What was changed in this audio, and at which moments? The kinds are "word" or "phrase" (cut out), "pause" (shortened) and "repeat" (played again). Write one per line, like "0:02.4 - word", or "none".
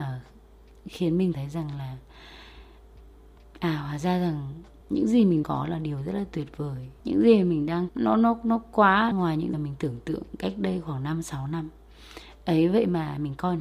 0:01.3 - word
0:03.4 - pause
0:04.8 - pause
0:05.4 - word
0:07.0 - pause
0:07.9 - phrase
0:09.1 - phrase
0:09.5 - word